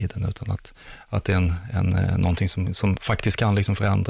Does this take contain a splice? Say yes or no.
no